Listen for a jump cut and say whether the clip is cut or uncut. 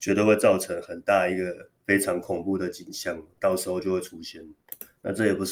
uncut